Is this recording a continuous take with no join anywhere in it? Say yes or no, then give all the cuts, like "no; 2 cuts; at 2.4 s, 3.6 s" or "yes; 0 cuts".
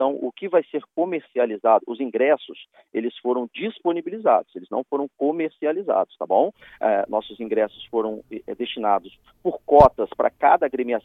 yes; 0 cuts